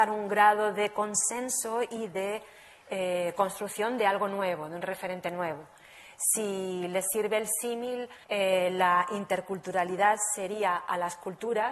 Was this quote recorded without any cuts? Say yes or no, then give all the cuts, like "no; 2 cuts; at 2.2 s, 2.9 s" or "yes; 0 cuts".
no; 1 cut; at 8.2 s